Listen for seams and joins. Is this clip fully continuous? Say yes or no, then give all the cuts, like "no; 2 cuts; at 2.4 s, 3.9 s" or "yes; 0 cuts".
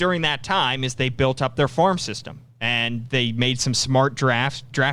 yes; 0 cuts